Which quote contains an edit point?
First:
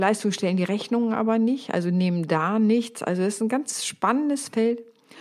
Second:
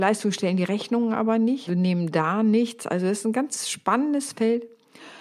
second; 1 cut; at 1.7 s

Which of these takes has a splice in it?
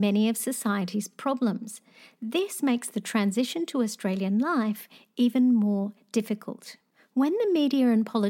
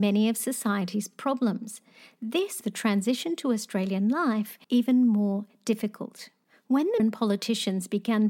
second; 3 cuts; at 2.6 s, 4.6 s, 7.0 s

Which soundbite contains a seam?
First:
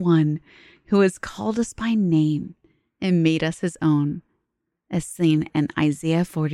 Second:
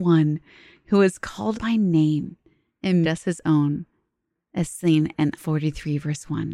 second; 3 cuts; at 1.5 s, 3.0 s, 5.4 s

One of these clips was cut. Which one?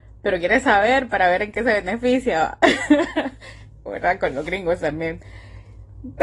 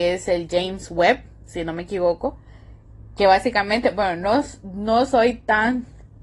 first; 1 cut; at 3.9 s

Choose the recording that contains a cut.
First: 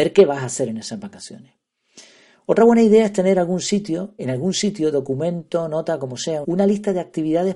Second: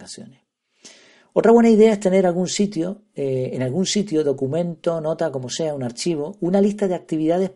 first; 2 cuts; at 4.2 s, 6.4 s

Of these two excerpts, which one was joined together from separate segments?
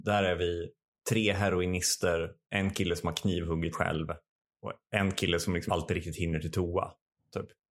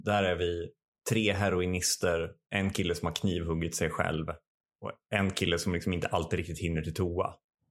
first; 2 cuts; at 3.7 s, 5.7 s

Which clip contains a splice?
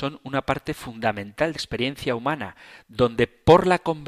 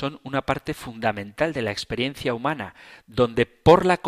first; 1 cut; at 1.6 s

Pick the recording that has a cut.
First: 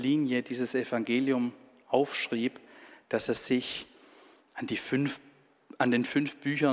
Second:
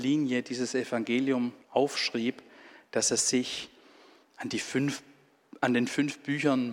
second; 1 cut; at 1.6 s

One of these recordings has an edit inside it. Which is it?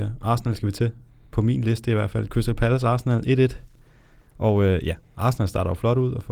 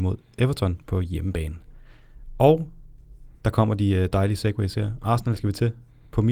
second; 1 cut; at 3.3 s

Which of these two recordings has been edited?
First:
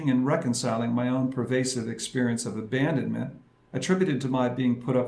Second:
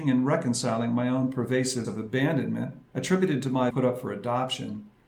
second; 3 cuts; at 1.8 s, 2.9 s, 3.7 s

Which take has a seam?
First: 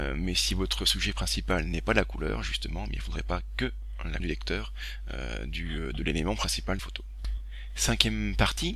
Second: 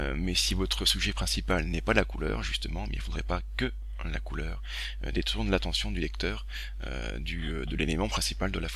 first; 2 cuts; at 4.2 s, 6.8 s

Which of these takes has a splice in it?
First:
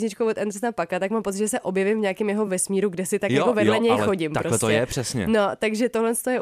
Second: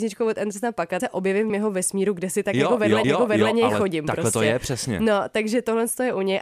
second; 3 cuts; at 1.0 s, 1.5 s, 3.0 s

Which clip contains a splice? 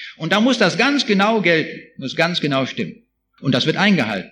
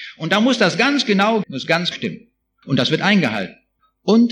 second; 2 cuts; at 1.4 s, 1.9 s

